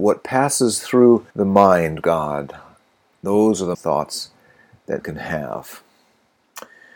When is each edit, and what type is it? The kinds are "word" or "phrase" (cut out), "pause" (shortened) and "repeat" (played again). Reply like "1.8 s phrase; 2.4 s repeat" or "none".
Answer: 1.3 s pause; 2.0 s phrase; 3.7 s phrase; 5.0 s word